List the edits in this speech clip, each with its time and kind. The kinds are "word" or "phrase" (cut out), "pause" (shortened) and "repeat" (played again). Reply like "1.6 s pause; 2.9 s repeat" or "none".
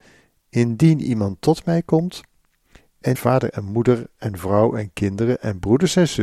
3.1 s phrase